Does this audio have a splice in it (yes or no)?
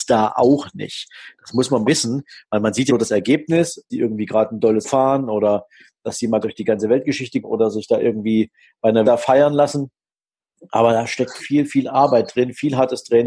yes